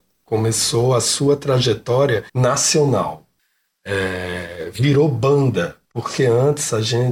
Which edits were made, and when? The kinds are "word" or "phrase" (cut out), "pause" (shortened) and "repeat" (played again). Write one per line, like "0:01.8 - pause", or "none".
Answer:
0:02.3 - pause
0:05.8 - pause